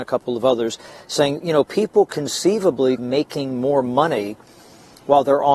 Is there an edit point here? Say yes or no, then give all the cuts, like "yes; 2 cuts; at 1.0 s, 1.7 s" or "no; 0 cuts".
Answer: yes; 1 cut; at 3.0 s